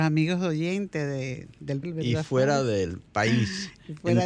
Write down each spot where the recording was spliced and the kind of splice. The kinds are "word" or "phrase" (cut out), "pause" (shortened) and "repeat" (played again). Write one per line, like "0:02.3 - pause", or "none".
0:01.8 - phrase